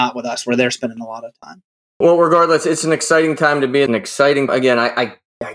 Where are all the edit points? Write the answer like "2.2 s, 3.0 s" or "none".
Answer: 1.8 s, 3.9 s, 4.5 s